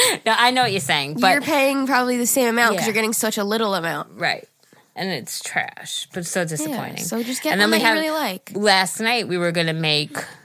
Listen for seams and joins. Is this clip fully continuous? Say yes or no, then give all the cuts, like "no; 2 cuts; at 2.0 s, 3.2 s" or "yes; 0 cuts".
yes; 0 cuts